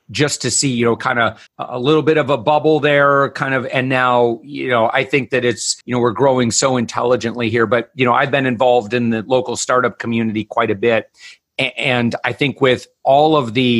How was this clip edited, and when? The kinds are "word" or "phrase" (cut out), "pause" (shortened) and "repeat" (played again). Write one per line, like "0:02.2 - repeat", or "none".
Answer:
0:01.5 - pause
0:05.8 - pause